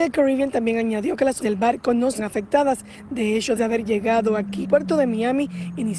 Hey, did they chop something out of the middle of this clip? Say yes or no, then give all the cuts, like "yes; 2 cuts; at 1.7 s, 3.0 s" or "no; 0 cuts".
yes; 4 cuts; at 1.4 s, 2.2 s, 3.6 s, 4.6 s